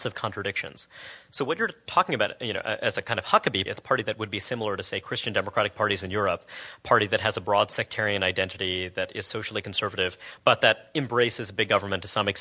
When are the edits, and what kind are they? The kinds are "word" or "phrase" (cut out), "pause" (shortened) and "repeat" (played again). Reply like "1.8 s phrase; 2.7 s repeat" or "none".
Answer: 3.7 s word

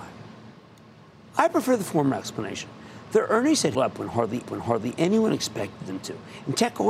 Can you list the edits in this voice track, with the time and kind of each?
3.7 s word; 4.4 s repeat

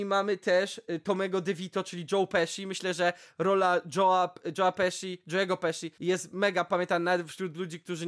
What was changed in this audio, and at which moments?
5.9 s pause

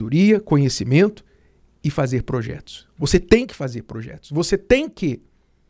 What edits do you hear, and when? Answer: none

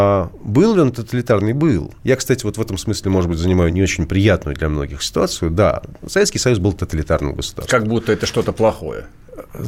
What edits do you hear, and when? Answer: 2.0 s pause; 3.7 s word

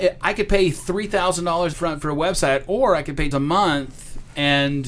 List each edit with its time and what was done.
1.7 s word; 3.3 s phrase

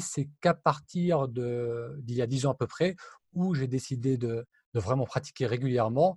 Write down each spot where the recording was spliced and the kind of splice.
none

